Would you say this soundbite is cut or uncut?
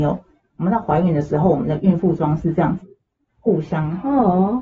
uncut